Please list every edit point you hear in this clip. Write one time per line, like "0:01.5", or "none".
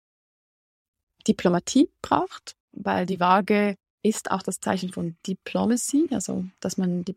0:03.8